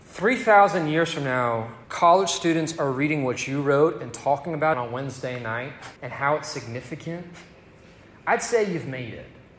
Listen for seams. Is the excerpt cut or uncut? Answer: cut